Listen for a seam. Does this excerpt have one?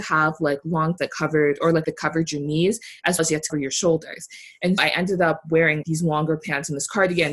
yes; 6 cuts; at 1.0 s, 1.8 s, 3.2 s, 3.5 s, 4.8 s, 5.8 s

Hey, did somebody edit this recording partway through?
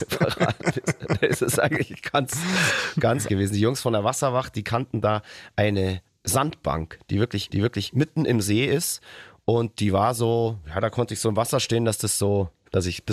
yes; 3 cuts; at 3.3 s, 6.1 s, 7.5 s

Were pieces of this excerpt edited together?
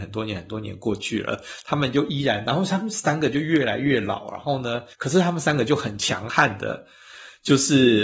yes; 1 cut; at 4.9 s

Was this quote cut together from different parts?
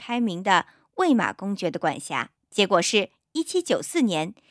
yes; 1 cut; at 2.4 s

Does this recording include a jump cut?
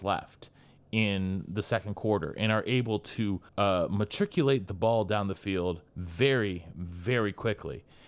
yes; 2 cuts; at 3.5 s, 5.9 s

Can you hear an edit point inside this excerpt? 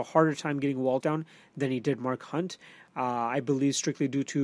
yes; 1 cut; at 1.0 s

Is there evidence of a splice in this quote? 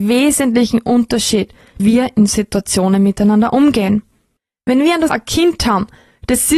yes; 4 cuts; at 1.8 s, 2.3 s, 4.4 s, 5.1 s

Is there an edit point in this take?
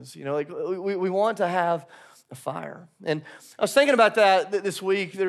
no; 0 cuts

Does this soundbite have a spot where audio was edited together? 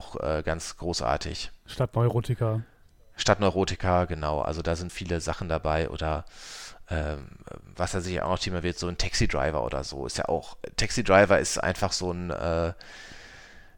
yes; 1 cut; at 4.9 s

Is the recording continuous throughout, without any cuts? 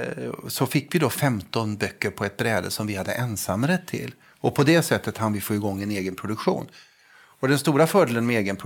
yes; 0 cuts

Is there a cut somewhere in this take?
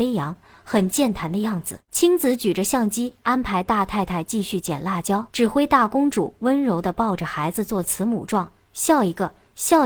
yes; 2 cuts; at 1.8 s, 5.3 s

